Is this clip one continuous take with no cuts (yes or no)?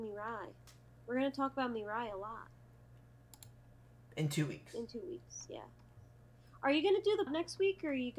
no